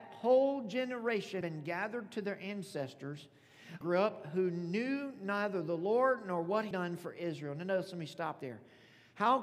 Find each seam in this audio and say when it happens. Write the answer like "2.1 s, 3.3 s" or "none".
1.4 s, 3.8 s, 6.7 s, 8.4 s